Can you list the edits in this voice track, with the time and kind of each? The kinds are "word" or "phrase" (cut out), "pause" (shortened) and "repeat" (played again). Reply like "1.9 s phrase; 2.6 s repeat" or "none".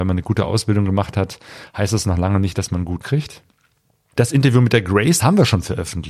3.0 s word; 5.2 s word